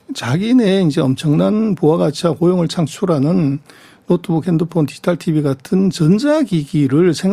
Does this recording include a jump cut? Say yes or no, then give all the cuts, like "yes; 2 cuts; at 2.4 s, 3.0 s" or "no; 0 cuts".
no; 0 cuts